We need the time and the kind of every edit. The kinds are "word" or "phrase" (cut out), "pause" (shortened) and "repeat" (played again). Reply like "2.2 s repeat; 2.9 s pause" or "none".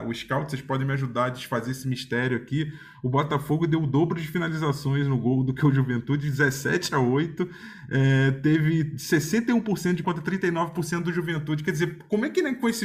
10.0 s phrase